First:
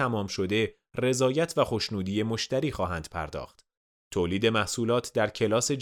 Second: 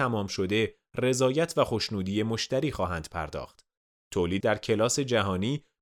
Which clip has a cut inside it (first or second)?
second